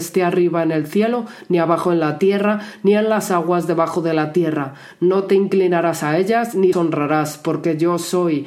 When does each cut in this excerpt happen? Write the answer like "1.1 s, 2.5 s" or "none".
6.7 s